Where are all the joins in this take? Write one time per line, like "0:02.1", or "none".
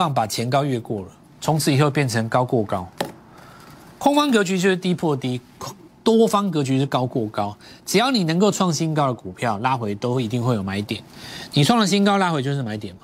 none